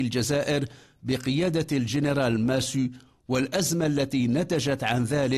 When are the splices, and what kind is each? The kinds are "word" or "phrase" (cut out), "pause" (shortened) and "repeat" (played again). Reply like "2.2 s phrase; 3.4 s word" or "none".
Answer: none